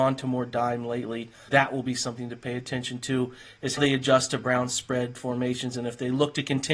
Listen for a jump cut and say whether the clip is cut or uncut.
cut